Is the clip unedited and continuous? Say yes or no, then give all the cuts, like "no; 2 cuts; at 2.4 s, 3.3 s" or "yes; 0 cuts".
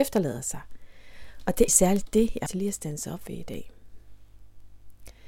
no; 2 cuts; at 1.7 s, 2.5 s